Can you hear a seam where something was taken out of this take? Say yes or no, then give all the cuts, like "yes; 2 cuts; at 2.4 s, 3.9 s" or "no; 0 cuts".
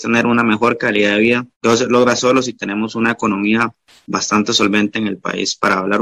yes; 1 cut; at 1.5 s